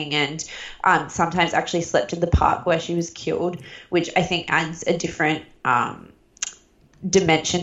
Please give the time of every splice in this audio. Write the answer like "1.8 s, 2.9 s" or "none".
none